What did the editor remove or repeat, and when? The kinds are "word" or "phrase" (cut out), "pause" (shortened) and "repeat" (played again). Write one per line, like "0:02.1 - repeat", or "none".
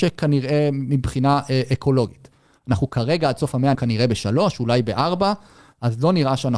0:03.7 - word